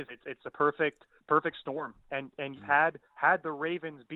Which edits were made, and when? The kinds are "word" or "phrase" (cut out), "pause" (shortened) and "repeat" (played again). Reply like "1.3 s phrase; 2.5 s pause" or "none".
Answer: 1.2 s pause; 2.5 s word; 3.1 s pause